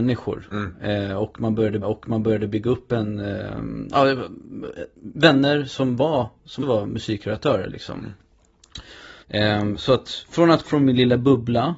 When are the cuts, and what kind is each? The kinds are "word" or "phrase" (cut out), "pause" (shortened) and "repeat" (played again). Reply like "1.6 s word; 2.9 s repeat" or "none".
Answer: 1.8 s repeat; 4.9 s pause; 6.6 s word; 9.2 s pause; 10.6 s word